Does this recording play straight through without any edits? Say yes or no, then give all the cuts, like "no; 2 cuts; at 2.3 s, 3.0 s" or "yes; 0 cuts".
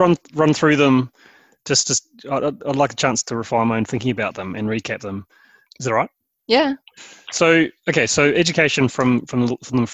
yes; 0 cuts